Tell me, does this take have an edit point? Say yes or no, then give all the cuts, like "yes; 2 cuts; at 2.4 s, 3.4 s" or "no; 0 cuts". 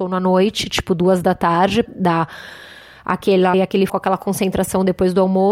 yes; 3 cuts; at 1.9 s, 3.5 s, 3.9 s